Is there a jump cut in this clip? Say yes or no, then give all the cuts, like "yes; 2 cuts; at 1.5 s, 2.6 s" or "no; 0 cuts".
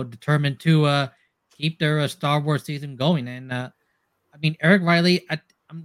no; 0 cuts